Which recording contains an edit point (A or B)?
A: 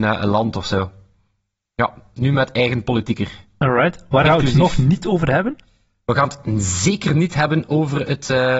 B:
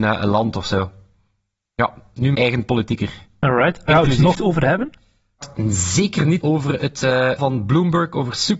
B